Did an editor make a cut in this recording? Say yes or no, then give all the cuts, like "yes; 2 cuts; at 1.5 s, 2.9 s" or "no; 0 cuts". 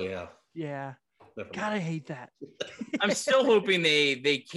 no; 0 cuts